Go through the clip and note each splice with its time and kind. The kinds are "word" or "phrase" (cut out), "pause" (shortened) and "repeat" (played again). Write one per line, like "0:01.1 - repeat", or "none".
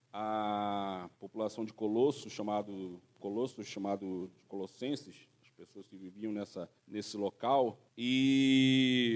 0:01.1 - pause
0:05.3 - pause
0:06.8 - pause
0:07.9 - pause